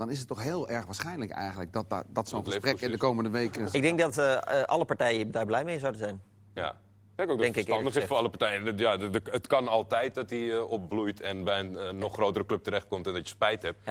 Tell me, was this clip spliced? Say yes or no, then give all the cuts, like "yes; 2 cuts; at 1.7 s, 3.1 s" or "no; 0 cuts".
no; 0 cuts